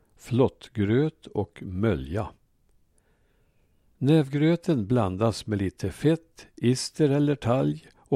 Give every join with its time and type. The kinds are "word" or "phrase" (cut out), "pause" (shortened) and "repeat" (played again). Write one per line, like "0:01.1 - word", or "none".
none